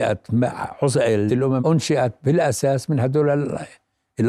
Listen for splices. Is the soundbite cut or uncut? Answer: cut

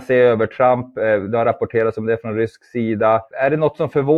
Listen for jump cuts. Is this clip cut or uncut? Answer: uncut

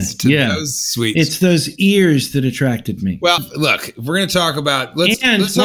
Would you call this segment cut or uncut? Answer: cut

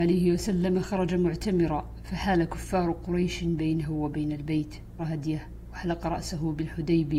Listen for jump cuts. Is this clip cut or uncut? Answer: cut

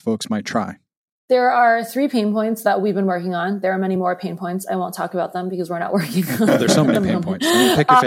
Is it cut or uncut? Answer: uncut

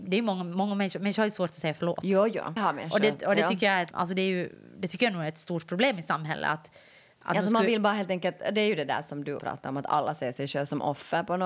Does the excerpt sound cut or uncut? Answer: cut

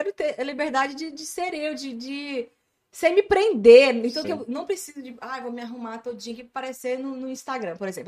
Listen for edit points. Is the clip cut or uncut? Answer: cut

